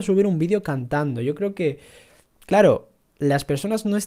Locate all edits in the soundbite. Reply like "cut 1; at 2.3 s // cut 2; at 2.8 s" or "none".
none